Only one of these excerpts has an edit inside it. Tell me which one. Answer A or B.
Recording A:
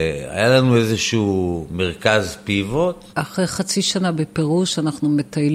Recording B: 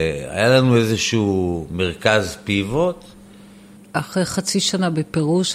A